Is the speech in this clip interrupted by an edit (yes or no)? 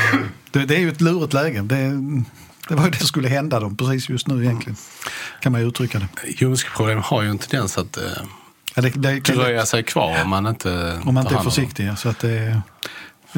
yes